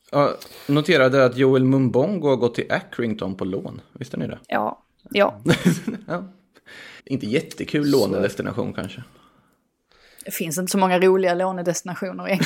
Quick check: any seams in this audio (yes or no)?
yes